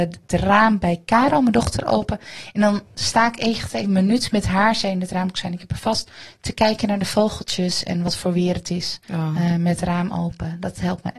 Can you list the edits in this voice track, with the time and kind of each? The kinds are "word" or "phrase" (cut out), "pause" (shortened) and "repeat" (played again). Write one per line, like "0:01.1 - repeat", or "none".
0:09.0 - pause